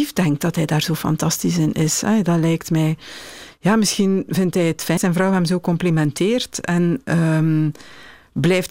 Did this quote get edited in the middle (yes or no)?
yes